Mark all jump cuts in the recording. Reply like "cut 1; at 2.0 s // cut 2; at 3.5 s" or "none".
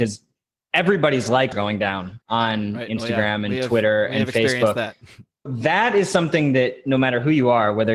cut 1; at 1.5 s // cut 2; at 2.2 s // cut 3; at 5.5 s